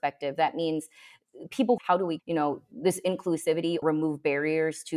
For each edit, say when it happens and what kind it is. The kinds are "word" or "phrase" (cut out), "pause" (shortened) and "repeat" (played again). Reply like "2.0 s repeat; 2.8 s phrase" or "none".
1.8 s phrase; 2.2 s word; 3.8 s word